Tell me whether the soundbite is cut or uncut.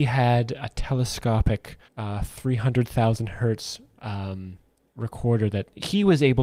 cut